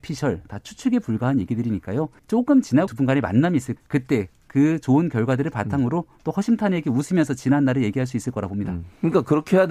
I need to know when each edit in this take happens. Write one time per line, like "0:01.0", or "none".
0:02.2
0:02.9
0:03.8